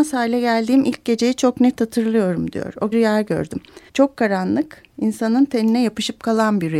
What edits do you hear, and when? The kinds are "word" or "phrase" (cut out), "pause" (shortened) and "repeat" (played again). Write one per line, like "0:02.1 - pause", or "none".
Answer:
0:02.9 - phrase
0:03.9 - pause